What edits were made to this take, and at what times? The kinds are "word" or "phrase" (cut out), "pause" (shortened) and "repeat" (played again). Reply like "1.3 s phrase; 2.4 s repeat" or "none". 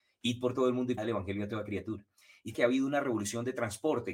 1.0 s word; 2.5 s word